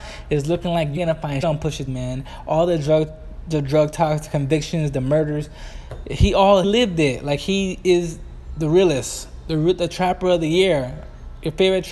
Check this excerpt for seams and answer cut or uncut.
cut